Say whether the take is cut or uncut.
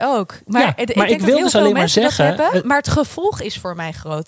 uncut